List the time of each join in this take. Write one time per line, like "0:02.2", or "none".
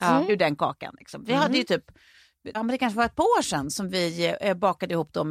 0:02.5